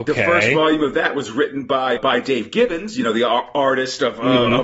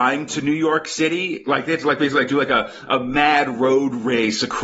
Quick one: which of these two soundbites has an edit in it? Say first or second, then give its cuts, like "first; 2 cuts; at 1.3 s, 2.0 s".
first; 1 cut; at 2.0 s